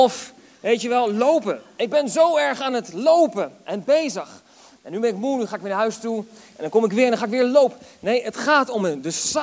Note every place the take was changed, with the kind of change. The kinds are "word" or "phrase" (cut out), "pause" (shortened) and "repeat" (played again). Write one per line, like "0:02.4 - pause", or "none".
none